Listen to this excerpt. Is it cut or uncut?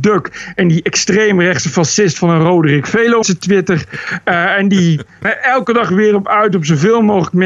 cut